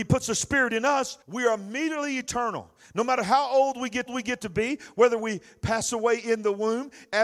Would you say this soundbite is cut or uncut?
cut